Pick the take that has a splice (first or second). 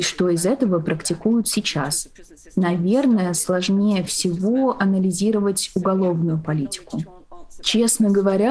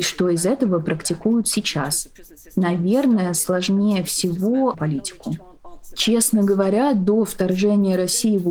second